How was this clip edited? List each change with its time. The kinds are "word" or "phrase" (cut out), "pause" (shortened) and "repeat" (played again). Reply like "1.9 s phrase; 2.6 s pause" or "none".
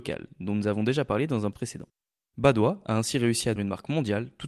1.5 s word; 3.6 s word